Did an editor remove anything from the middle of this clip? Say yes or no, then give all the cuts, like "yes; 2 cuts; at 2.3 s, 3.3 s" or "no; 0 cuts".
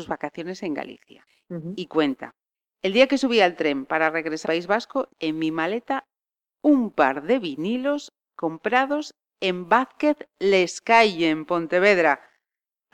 yes; 2 cuts; at 4.4 s, 5.1 s